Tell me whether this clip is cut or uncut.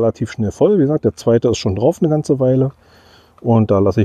uncut